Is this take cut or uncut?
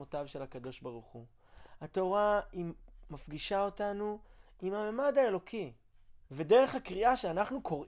cut